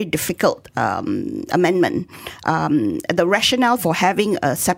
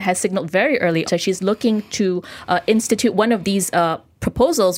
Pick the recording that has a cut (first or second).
second